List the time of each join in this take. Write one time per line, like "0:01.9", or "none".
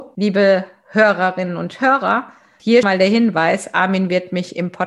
0:02.8